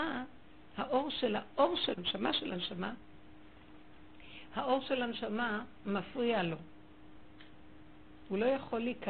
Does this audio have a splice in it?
yes; 1 cut; at 1.9 s

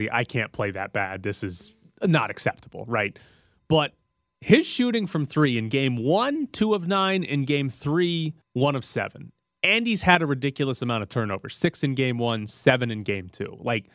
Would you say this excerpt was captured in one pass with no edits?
no; 1 cut; at 8.4 s

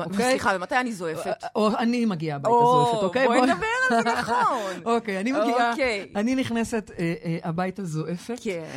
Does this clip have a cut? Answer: no; 0 cuts

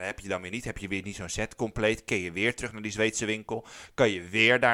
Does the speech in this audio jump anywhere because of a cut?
no; 0 cuts

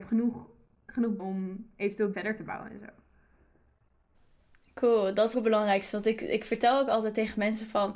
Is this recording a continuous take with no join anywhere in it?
no; 3 cuts; at 1.2 s, 2.1 s, 5.3 s

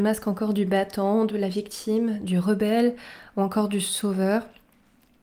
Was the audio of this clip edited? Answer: no; 0 cuts

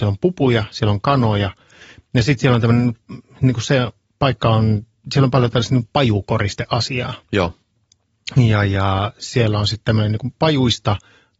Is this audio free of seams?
yes; 0 cuts

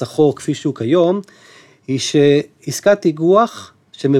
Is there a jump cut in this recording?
no; 0 cuts

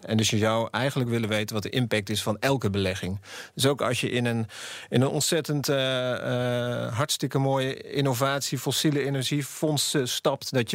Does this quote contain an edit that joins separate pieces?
no; 0 cuts

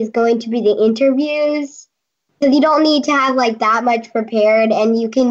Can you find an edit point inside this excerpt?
no; 0 cuts

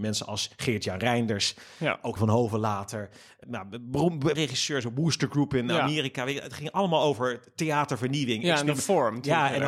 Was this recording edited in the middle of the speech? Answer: yes; 3 cuts; at 2.2 s, 3.4 s, 4.3 s

